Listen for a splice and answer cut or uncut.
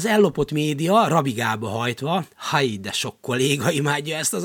uncut